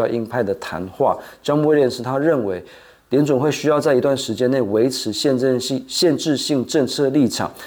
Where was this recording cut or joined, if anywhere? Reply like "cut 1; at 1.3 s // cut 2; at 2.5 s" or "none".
none